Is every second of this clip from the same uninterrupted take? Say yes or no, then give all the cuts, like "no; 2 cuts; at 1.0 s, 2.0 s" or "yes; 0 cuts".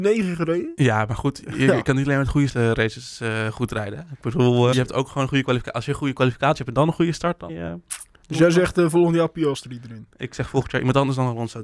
no; 3 cuts; at 2.5 s, 4.7 s, 7.5 s